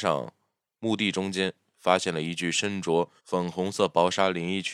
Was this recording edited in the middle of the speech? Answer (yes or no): yes